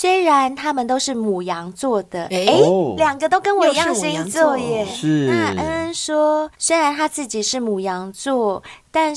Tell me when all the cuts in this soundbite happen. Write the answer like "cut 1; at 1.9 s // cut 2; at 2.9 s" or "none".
none